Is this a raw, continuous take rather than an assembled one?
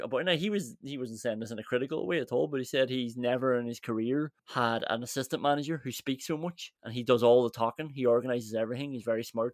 no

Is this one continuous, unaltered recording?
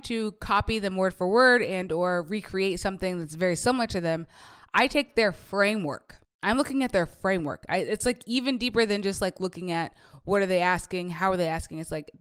no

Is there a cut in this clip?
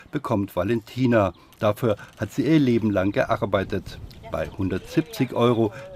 no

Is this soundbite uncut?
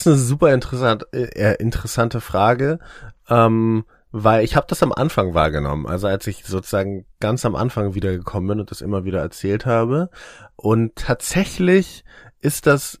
yes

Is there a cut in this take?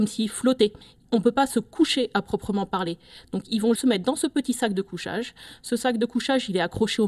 yes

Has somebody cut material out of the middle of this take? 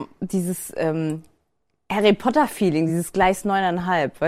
no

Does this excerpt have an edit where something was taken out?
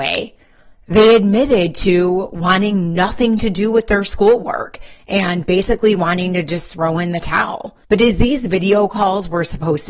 yes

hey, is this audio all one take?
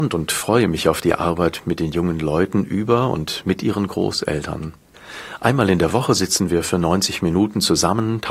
yes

